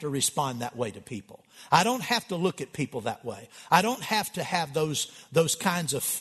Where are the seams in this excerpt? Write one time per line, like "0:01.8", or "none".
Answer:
none